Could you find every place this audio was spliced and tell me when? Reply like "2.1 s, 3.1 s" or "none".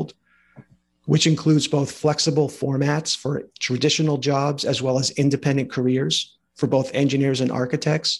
none